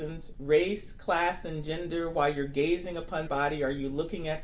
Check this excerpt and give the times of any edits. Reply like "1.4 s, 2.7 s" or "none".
3.2 s

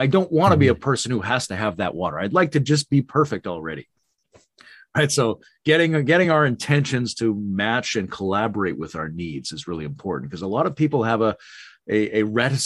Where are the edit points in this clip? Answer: none

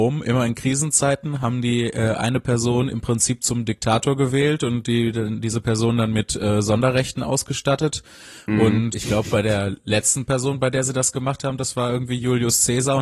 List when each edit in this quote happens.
8.9 s

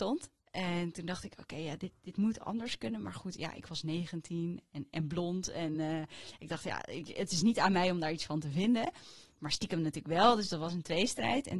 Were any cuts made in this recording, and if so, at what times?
none

